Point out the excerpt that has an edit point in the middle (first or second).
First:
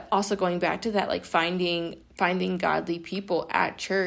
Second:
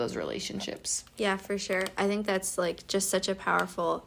first